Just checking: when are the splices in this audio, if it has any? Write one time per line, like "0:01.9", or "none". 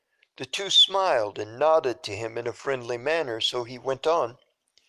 none